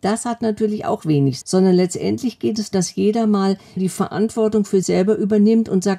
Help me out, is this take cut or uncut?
cut